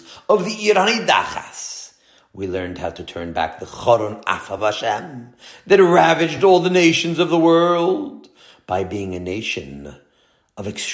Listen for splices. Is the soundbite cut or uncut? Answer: uncut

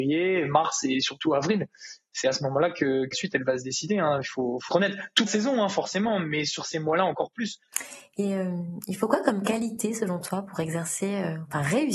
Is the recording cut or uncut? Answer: cut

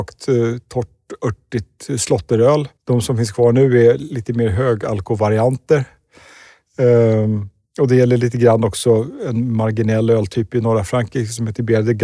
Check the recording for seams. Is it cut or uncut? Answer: cut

